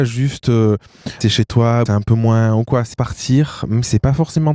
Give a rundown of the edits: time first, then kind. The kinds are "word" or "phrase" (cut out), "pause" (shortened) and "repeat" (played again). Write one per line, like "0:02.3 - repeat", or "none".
0:01.2 - word
0:01.9 - word
0:02.9 - word